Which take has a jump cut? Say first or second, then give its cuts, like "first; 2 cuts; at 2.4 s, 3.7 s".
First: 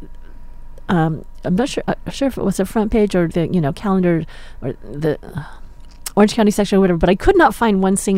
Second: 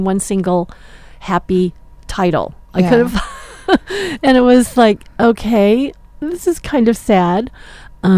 first; 1 cut; at 3.3 s